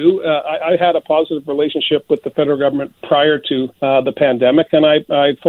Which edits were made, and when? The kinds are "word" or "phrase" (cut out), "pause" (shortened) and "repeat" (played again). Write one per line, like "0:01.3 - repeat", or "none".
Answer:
0:03.7 - pause